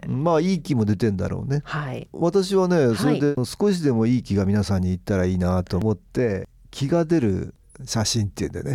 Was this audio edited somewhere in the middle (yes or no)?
no